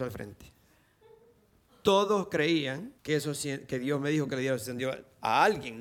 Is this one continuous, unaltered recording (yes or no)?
no